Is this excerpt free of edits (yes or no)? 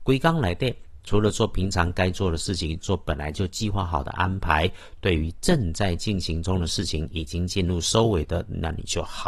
yes